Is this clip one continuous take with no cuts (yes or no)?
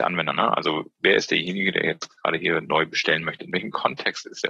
yes